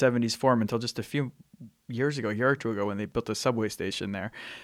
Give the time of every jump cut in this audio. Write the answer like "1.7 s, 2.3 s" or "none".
none